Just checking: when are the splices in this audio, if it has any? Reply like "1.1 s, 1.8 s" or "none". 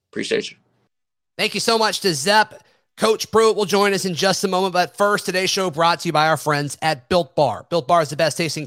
none